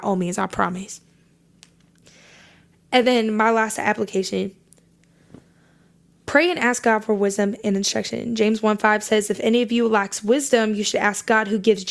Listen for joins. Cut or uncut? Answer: uncut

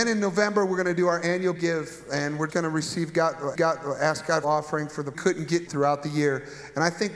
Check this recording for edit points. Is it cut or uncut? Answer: cut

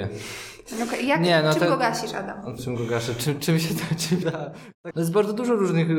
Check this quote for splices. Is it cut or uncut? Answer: cut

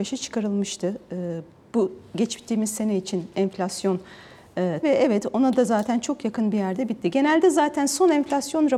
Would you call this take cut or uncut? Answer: cut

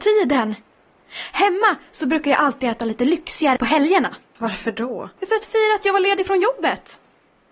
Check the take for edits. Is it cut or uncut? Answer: cut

